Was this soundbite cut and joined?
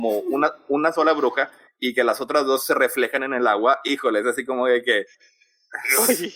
no; 0 cuts

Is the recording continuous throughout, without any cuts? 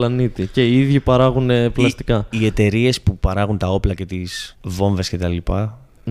no; 1 cut; at 4.5 s

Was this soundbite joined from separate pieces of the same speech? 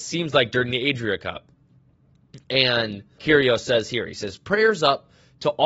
yes; 1 cut; at 3.2 s

